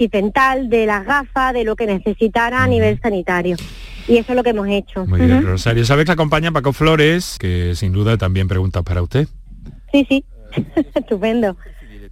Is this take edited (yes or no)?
yes